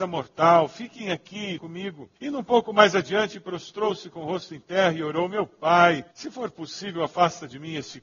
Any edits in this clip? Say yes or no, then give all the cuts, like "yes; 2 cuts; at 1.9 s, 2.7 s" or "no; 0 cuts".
yes; 3 cuts; at 1.6 s, 2.2 s, 6.1 s